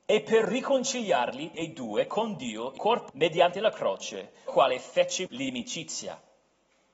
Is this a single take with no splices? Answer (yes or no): no